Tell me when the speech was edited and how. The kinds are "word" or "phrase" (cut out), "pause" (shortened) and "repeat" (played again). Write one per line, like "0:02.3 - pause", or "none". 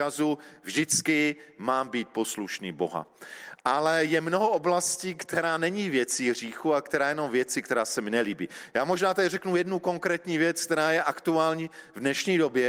none